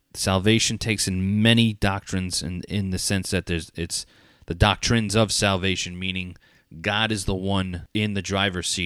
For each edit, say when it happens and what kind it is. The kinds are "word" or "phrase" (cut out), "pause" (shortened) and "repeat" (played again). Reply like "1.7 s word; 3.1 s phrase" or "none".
none